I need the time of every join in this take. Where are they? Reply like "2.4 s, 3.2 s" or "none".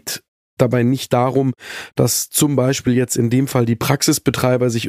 none